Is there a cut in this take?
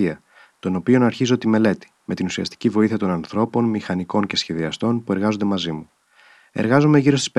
yes; 1 cut; at 1.9 s

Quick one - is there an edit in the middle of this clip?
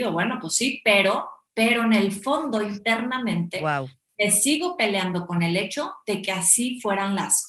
no; 0 cuts

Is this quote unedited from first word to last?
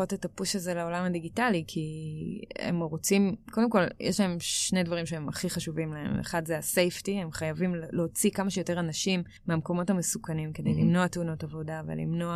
no; 1 cut; at 9.4 s

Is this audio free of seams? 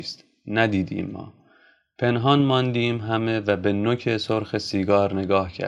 yes; 0 cuts

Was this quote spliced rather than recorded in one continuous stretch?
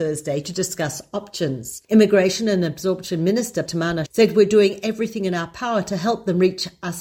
yes; 3 cuts; at 1.8 s, 3.7 s, 4.1 s

